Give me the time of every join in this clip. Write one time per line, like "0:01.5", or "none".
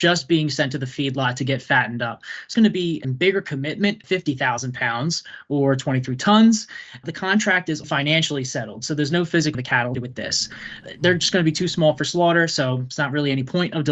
0:02.5
0:03.0
0:04.0
0:07.8
0:09.5
0:09.9